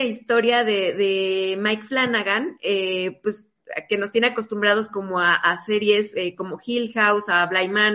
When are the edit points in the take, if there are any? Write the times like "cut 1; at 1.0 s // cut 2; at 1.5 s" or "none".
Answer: none